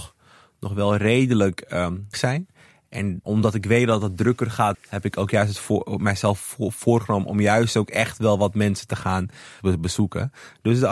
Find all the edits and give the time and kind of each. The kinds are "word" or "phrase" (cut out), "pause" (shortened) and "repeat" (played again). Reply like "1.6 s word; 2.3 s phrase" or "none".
2.1 s word; 3.2 s word; 4.7 s word; 9.6 s word

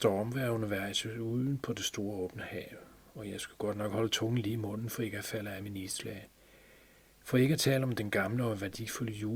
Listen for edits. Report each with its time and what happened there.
none

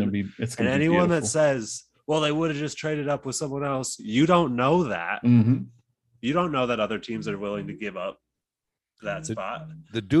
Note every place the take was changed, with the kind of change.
none

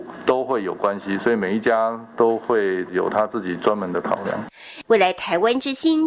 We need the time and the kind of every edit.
4.8 s phrase

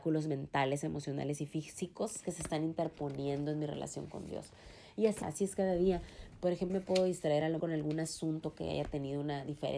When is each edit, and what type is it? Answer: 5.2 s phrase; 6.7 s word; 7.6 s word

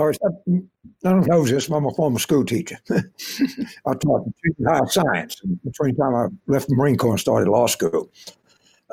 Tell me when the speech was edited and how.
1.2 s word

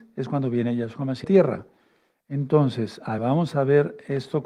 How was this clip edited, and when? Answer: 1.2 s phrase; 3.2 s word

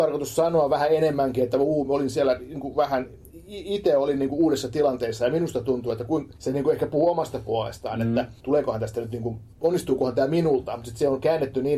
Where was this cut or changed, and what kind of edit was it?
6.4 s pause; 8.4 s pause; 9.5 s pause

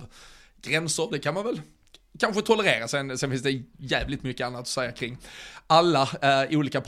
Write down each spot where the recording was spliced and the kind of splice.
none

